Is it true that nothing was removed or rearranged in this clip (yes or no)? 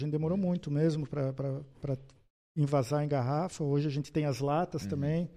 yes